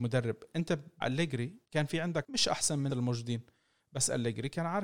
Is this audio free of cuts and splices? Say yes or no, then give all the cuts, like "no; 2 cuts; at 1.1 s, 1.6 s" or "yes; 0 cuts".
no; 4 cuts; at 1.0 s, 1.6 s, 2.2 s, 2.9 s